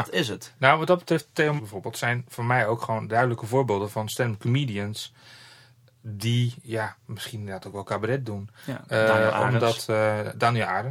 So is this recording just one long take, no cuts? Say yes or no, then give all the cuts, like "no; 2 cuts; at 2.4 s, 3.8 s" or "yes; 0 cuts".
no; 1 cut; at 1.6 s